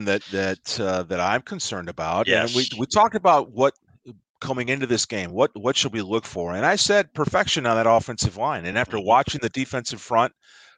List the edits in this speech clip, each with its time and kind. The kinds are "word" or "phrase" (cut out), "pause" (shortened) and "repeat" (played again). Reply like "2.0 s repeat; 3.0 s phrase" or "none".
none